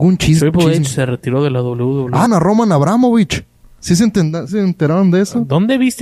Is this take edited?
yes; 2 cuts; at 2.3 s, 4.5 s

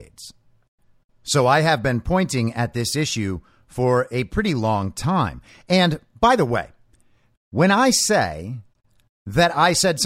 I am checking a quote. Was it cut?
no; 0 cuts

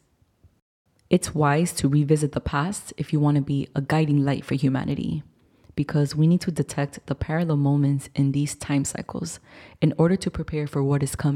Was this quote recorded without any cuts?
yes; 0 cuts

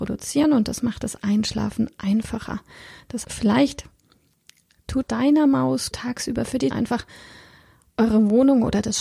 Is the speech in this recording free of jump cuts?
no; 4 cuts; at 3.2 s, 5.0 s, 5.9 s, 6.7 s

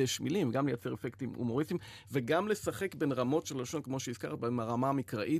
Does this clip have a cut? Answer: yes; 1 cut; at 3.4 s

